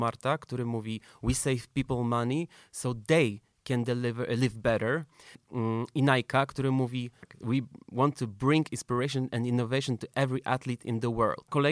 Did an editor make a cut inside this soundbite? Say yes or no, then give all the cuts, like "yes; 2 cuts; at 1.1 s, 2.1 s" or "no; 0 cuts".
no; 0 cuts